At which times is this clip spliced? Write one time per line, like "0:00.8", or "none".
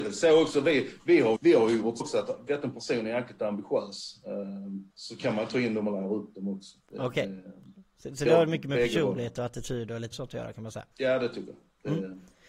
0:01.4
0:02.0
0:02.5
0:04.9
0:06.9
0:08.3
0:10.1
0:10.9